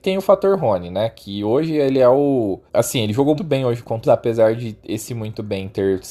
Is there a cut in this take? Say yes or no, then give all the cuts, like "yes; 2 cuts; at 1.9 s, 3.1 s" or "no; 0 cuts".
yes; 3 cuts; at 2.7 s, 3.4 s, 4.0 s